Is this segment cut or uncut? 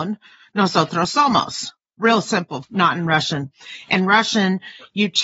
uncut